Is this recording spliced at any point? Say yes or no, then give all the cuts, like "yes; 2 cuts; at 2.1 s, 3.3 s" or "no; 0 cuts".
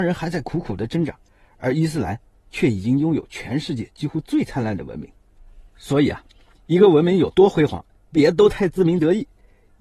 no; 0 cuts